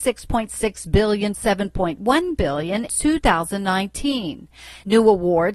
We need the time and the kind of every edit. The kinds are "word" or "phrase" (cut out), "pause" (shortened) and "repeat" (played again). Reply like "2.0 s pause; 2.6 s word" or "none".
1.3 s word; 2.9 s word

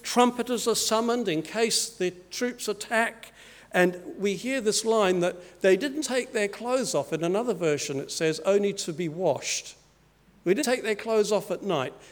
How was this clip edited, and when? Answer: 6.0 s word; 10.6 s word

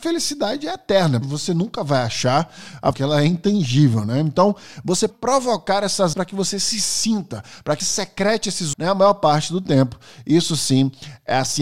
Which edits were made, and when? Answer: 1.2 s word; 2.9 s word; 5.1 s word; 6.1 s word; 7.8 s word; 8.7 s word

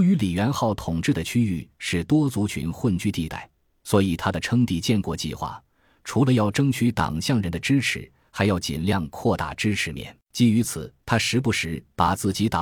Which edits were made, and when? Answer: 10.2 s pause; 11.0 s pause

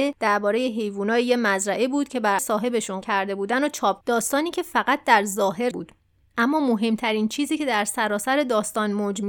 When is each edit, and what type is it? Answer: 2.4 s word; 3.0 s word; 4.0 s word; 5.7 s word

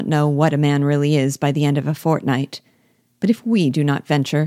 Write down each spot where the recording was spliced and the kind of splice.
none

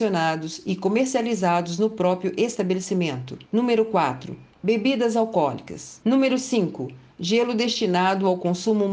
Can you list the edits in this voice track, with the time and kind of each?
3.5 s pause; 4.5 s pause; 6.0 s pause

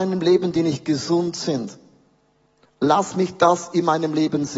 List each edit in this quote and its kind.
none

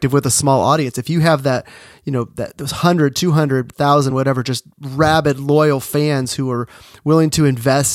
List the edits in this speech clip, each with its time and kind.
none

